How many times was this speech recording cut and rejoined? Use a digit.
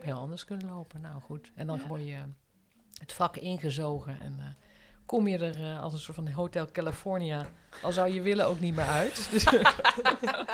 0